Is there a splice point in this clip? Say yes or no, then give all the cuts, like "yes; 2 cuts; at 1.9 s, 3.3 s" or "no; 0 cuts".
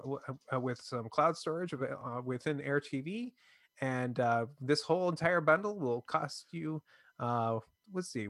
no; 0 cuts